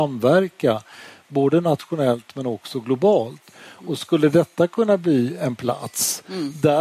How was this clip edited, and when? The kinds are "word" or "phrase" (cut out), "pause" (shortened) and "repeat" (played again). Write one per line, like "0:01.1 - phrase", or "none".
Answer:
none